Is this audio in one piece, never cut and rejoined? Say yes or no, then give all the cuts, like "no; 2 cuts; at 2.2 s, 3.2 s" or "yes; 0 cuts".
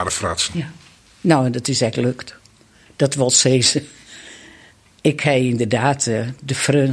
yes; 0 cuts